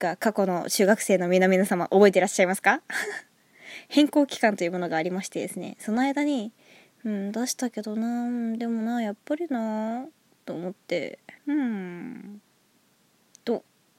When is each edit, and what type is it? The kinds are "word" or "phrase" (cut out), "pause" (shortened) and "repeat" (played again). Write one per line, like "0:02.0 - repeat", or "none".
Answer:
0:11.4 - pause